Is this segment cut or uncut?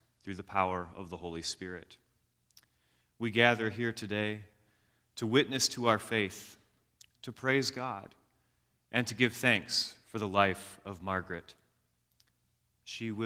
uncut